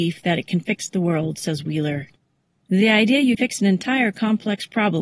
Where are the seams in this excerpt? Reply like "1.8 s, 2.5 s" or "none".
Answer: 3.4 s